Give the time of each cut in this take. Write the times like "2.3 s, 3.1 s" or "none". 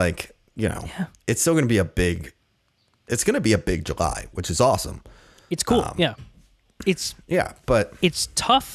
none